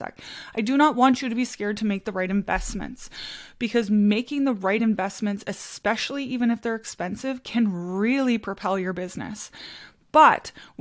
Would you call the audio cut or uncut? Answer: uncut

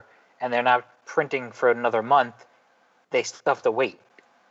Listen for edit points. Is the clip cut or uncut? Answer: uncut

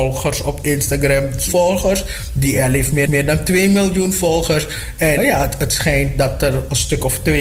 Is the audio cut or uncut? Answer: cut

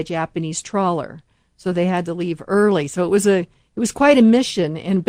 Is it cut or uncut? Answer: uncut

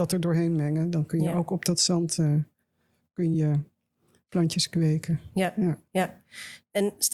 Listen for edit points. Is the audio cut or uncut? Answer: uncut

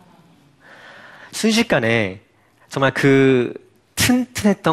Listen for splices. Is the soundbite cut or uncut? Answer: uncut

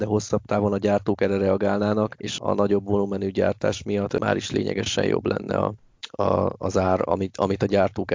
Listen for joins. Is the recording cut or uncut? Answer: uncut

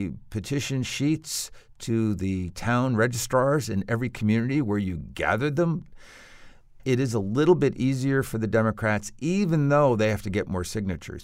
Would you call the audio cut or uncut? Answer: uncut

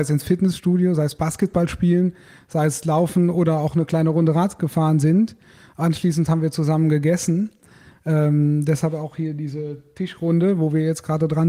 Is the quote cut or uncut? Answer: uncut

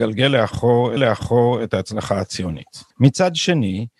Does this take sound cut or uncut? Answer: cut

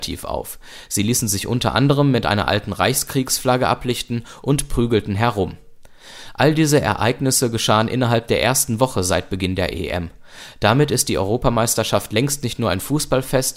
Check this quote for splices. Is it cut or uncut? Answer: uncut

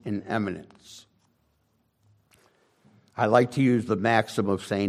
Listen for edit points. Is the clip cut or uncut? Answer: uncut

